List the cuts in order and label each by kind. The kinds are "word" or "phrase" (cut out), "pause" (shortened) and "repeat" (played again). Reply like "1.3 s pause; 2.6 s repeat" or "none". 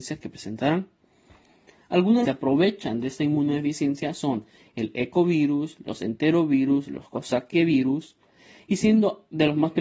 2.2 s phrase